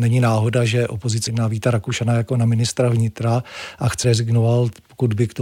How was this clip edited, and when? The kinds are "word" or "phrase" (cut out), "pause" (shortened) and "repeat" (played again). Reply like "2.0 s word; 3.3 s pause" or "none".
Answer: 1.3 s word; 4.0 s word